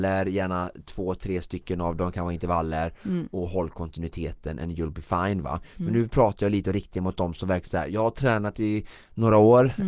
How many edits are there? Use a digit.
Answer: 0